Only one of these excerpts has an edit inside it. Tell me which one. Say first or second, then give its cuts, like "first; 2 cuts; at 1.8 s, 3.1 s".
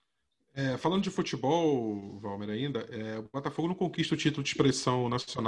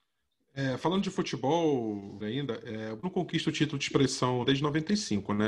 second; 3 cuts; at 2.2 s, 3.0 s, 4.4 s